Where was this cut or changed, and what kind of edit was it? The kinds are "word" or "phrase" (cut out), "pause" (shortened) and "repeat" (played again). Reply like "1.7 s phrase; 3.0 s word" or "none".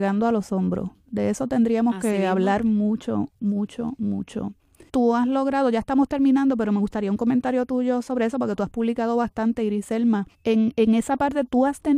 4.9 s pause; 10.3 s pause